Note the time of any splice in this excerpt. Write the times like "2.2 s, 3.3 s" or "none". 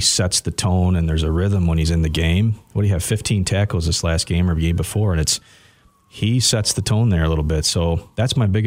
none